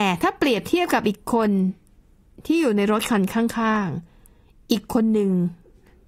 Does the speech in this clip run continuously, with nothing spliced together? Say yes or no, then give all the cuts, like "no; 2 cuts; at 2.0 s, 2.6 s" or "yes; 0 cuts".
yes; 0 cuts